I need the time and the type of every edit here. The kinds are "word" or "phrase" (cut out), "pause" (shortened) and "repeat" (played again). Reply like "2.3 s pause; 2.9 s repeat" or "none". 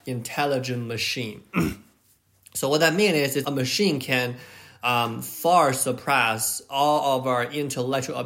3.4 s word